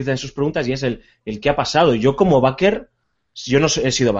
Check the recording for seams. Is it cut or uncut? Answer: uncut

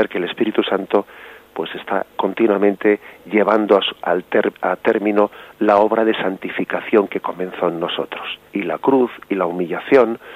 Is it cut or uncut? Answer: cut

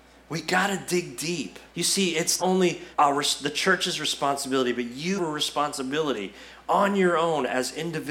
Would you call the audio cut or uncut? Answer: cut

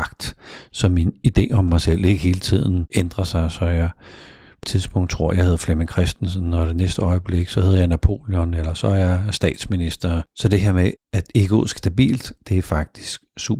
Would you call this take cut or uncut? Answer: cut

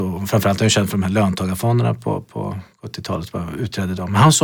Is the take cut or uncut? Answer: cut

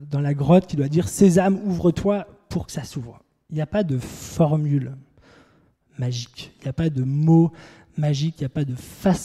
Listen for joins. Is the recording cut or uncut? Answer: uncut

